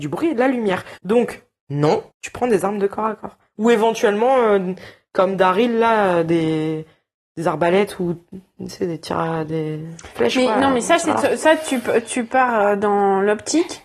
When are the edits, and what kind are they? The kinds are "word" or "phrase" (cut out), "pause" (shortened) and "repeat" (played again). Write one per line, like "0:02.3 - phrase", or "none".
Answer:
0:01.0 - pause
0:02.1 - pause